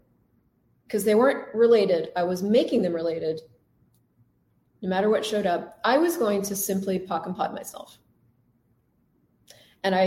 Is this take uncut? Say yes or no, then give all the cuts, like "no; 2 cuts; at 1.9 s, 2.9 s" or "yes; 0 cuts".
yes; 0 cuts